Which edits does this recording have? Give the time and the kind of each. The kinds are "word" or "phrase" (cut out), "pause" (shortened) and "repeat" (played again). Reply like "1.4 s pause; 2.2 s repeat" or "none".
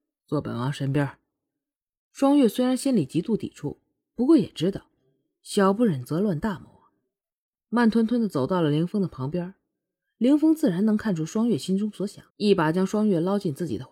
12.3 s pause